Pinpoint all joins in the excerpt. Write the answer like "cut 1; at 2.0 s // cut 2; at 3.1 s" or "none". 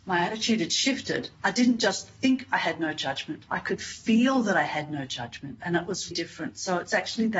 cut 1; at 1.3 s // cut 2; at 3.5 s // cut 3; at 6.1 s